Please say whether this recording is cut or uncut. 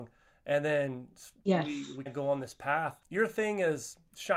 cut